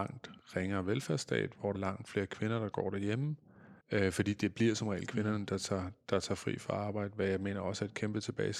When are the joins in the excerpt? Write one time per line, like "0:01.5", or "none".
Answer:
0:01.7
0:03.8